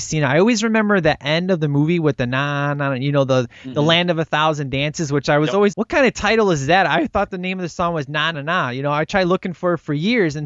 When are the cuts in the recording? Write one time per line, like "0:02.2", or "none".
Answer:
0:05.7
0:08.3